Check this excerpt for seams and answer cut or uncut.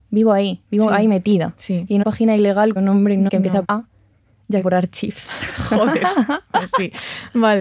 cut